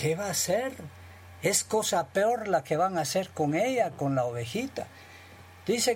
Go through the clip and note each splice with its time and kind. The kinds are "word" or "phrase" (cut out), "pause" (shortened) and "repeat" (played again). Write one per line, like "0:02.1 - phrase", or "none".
none